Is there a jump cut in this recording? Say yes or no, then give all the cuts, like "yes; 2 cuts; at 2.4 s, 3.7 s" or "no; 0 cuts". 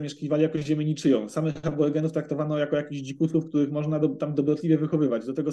no; 0 cuts